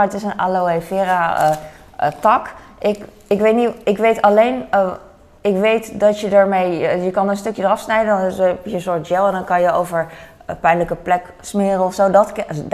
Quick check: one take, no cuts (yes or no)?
yes